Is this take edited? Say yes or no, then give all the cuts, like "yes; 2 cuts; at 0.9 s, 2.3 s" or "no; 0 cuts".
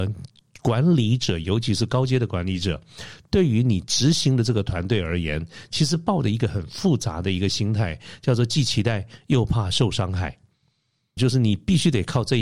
yes; 1 cut; at 11.2 s